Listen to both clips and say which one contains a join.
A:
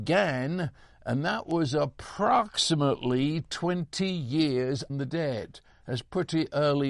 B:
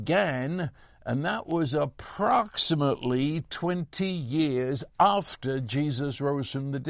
A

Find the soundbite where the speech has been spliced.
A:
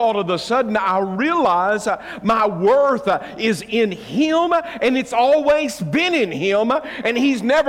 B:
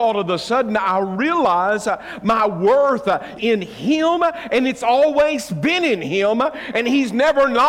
B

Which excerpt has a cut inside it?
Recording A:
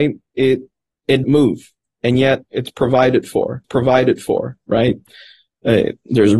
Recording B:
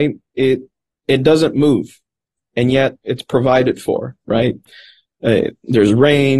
A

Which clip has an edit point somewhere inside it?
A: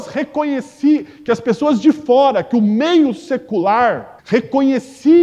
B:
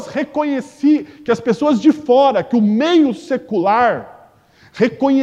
A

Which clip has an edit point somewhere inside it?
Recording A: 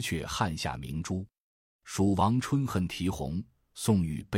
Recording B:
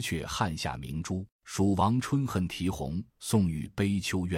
B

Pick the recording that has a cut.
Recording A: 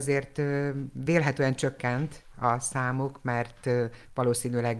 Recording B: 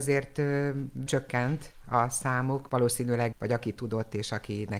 B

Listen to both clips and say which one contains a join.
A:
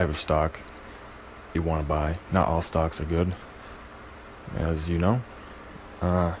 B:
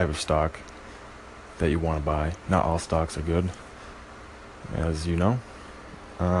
A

